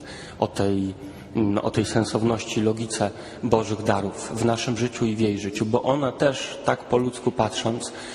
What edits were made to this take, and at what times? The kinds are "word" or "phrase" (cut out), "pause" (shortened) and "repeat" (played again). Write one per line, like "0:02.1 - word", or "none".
none